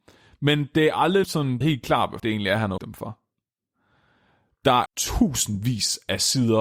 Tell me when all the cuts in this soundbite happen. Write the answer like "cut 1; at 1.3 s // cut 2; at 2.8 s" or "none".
cut 1; at 1.2 s // cut 2; at 1.6 s // cut 3; at 2.2 s // cut 4; at 2.8 s // cut 5; at 4.9 s